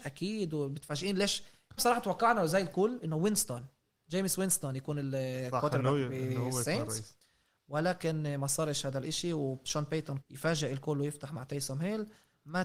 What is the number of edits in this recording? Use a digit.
2